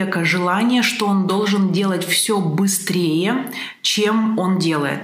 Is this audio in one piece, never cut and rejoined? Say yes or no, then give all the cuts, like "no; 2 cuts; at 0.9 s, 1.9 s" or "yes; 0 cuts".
yes; 0 cuts